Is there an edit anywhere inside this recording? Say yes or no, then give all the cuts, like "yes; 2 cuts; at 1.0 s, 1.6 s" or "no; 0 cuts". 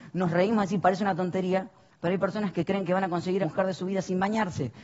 yes; 1 cut; at 3.4 s